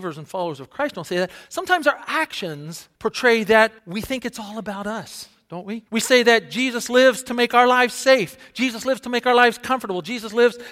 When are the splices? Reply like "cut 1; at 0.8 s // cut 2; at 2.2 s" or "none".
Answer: cut 1; at 3.0 s // cut 2; at 3.8 s // cut 3; at 5.9 s